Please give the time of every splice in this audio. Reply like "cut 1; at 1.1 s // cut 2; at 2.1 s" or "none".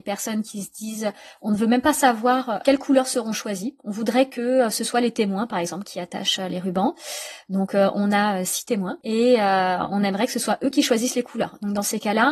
none